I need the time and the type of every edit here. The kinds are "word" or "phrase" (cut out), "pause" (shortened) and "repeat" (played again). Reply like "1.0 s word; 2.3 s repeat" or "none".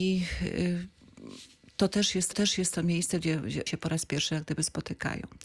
2.3 s repeat; 3.7 s word